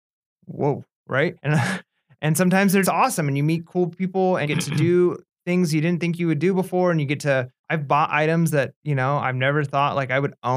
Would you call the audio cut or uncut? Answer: cut